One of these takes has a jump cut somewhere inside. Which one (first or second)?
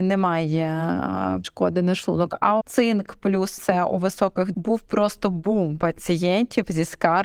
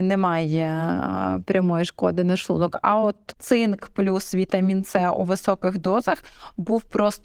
first